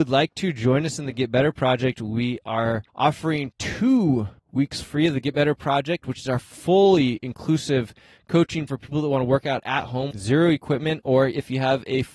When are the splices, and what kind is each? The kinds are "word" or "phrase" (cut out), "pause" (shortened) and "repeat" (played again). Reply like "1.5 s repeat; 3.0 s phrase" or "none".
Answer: 2.9 s pause; 4.4 s pause; 8.7 s word; 10.1 s word